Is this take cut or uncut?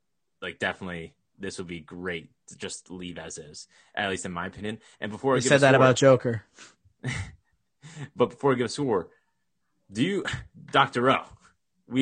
uncut